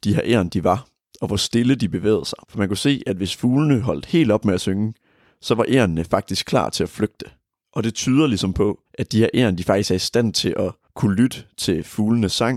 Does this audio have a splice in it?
yes; 2 cuts; at 2.4 s, 8.9 s

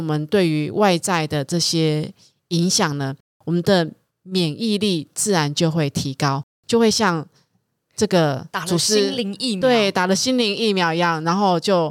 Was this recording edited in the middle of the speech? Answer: no; 0 cuts

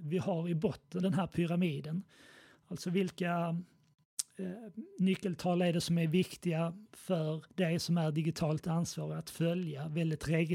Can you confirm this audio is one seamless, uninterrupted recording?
no; 2 cuts; at 1.0 s, 7.5 s

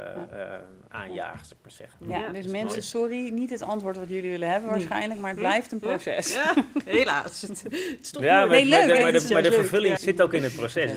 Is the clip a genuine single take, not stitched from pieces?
no; 1 cut; at 10.0 s

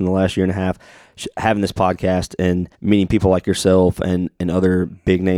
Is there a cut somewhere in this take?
yes; 1 cut; at 2.7 s

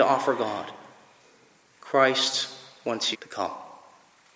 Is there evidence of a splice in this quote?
yes; 1 cut; at 3.1 s

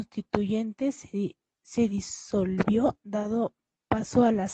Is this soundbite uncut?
yes; 0 cuts

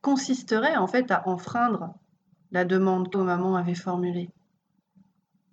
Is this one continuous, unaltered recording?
no; 1 cut; at 3.1 s

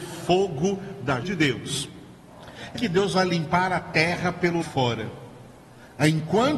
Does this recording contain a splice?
yes; 3 cuts; at 1.2 s, 2.7 s, 4.6 s

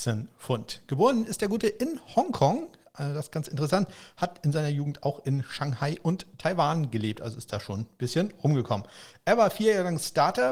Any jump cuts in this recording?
no; 0 cuts

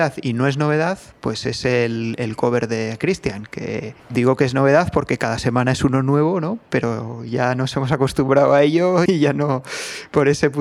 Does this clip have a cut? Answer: yes; 2 cuts; at 4.0 s, 9.1 s

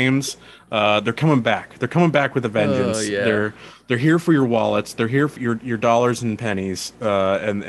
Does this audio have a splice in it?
yes; 1 cut; at 5.4 s

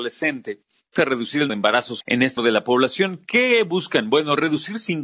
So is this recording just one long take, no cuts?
no; 4 cuts; at 1.0 s, 1.5 s, 2.0 s, 2.4 s

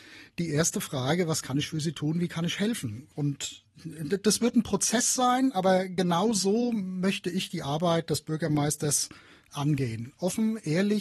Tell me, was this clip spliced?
no; 0 cuts

